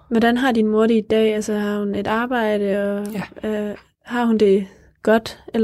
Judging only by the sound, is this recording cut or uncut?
uncut